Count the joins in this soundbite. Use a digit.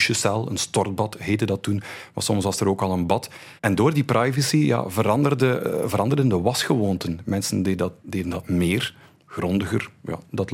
1